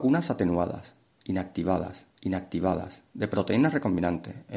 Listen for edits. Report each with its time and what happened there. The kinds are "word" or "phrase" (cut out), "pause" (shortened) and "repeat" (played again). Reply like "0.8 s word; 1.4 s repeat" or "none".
2.1 s repeat